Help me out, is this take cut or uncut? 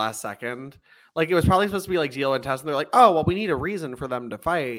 uncut